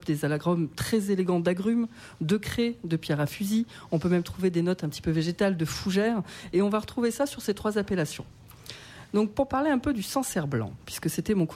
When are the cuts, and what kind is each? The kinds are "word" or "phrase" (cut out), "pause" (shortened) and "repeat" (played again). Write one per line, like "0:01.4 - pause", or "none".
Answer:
none